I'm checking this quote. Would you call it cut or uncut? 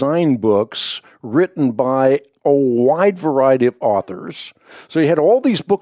uncut